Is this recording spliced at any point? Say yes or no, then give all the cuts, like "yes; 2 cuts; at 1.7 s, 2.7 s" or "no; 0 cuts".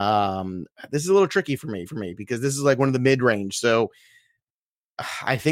yes; 1 cut; at 1.9 s